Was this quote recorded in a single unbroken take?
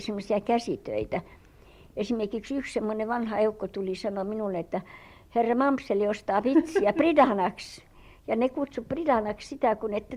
yes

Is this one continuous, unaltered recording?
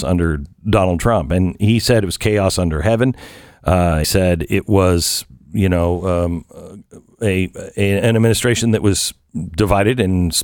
no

